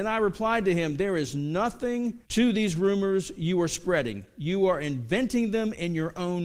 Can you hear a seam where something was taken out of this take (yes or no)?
yes